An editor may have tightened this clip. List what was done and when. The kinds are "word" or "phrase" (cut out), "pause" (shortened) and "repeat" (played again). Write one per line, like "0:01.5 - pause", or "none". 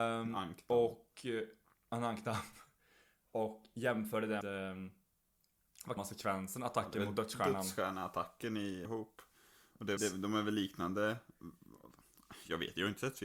0:04.4 - word
0:06.0 - word
0:08.8 - word
0:10.0 - word